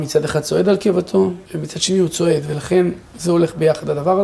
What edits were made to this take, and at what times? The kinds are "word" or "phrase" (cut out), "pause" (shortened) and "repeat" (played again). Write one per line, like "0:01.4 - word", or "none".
0:01.4 - pause